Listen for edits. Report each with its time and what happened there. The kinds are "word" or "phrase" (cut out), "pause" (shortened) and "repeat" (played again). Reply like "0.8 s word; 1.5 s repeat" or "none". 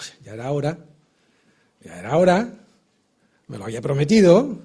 none